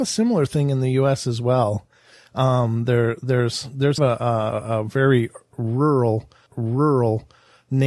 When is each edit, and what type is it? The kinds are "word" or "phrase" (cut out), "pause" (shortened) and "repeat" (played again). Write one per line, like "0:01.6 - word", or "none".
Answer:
0:04.0 - phrase
0:06.5 - repeat